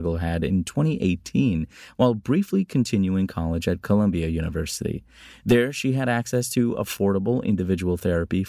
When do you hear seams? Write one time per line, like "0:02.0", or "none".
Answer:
none